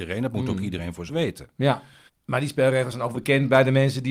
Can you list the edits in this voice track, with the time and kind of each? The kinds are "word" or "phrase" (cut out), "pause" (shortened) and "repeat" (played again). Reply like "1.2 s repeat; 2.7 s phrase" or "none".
1.1 s word; 2.1 s pause; 3.1 s word